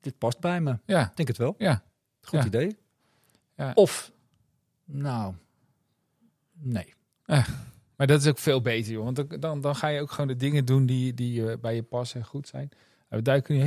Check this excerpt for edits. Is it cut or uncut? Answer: uncut